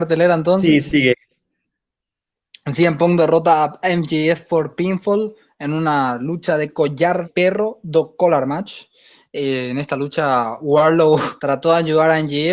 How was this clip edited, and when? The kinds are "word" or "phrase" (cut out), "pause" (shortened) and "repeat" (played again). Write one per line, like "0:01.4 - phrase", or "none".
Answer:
0:07.2 - word
0:11.4 - pause